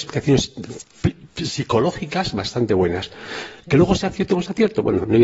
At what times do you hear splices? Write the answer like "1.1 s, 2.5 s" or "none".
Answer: 3.6 s